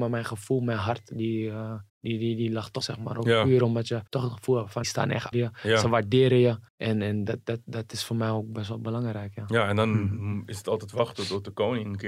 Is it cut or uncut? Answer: cut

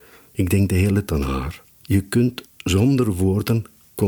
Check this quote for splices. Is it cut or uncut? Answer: cut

